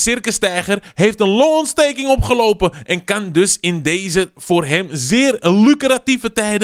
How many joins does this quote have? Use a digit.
0